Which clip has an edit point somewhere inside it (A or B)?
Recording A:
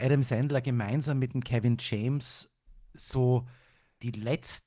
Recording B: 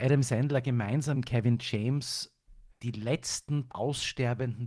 B